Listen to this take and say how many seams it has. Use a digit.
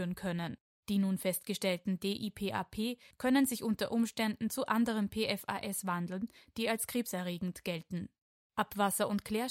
0